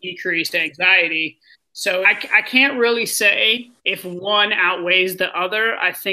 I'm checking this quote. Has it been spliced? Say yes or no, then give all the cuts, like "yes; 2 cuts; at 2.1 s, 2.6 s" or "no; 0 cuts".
yes; 2 cuts; at 2.0 s, 3.8 s